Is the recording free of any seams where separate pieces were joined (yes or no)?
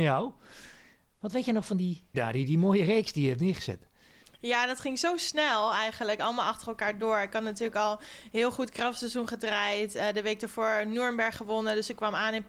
no